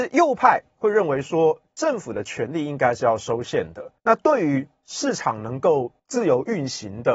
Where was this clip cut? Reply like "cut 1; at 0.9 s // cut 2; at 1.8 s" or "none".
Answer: cut 1; at 4.0 s // cut 2; at 6.0 s